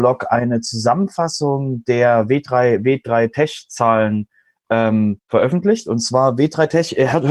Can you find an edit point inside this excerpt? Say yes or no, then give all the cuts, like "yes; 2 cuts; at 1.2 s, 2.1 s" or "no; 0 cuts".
yes; 1 cut; at 5.2 s